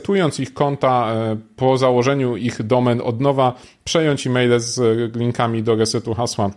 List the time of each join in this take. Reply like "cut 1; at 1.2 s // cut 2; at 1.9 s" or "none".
none